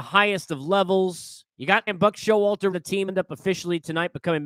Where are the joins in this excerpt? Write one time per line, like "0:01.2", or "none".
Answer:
0:01.5
0:01.9
0:02.7
0:03.1